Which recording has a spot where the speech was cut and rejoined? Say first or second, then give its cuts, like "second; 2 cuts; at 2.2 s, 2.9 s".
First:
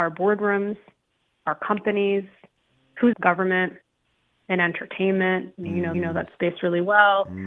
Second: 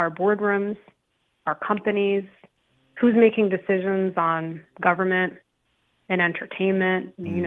first; 2 cuts; at 3.1 s, 5.9 s